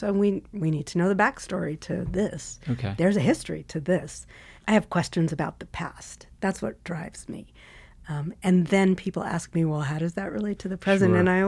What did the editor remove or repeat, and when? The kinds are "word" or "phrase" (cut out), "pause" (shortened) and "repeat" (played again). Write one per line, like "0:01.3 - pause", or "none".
none